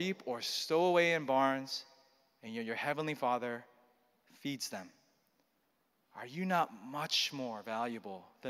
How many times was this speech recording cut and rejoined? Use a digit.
0